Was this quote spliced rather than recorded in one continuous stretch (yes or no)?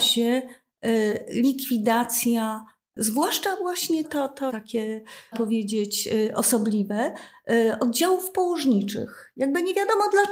yes